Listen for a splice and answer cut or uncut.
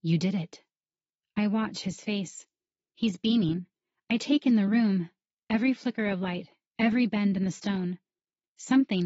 uncut